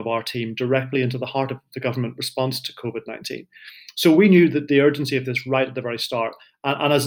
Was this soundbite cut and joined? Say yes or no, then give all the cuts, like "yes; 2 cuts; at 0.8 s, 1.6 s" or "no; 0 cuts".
no; 0 cuts